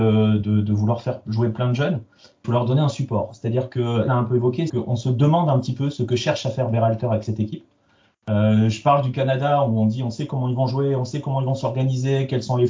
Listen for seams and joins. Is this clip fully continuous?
no; 3 cuts; at 2.4 s, 4.1 s, 4.7 s

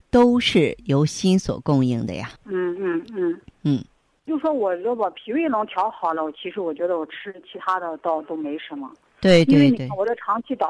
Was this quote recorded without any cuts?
no; 1 cut; at 2.4 s

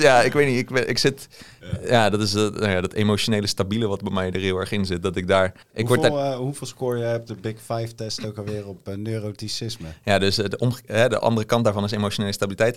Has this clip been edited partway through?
yes; 1 cut; at 5.6 s

